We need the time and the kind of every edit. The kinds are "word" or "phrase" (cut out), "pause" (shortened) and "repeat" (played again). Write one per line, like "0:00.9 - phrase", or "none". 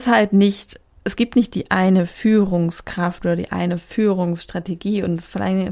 0:00.9 - pause